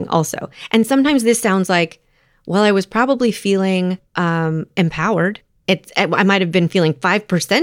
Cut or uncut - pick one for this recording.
uncut